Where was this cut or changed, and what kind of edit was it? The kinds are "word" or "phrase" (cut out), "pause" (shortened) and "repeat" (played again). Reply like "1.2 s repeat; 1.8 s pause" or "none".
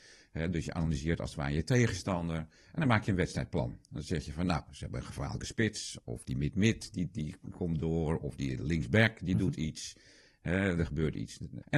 none